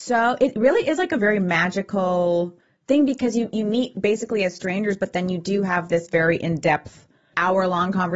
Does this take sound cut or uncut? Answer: uncut